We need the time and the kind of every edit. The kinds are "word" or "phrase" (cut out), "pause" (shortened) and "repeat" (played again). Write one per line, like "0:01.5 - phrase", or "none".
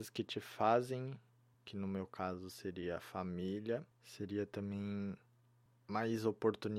0:01.5 - phrase
0:03.9 - pause